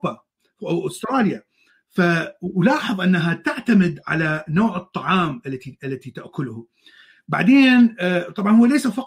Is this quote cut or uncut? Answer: uncut